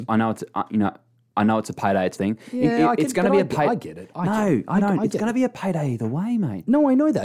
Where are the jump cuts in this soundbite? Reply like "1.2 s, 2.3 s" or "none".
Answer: 2.2 s